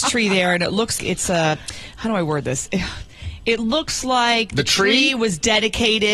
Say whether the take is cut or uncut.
cut